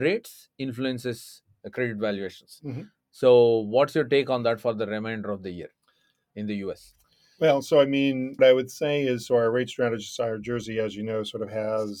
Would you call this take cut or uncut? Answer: cut